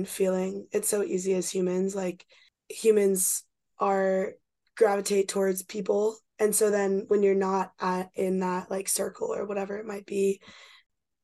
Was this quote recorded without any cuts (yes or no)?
yes